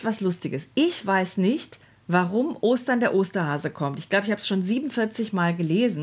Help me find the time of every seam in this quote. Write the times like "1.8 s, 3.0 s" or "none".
none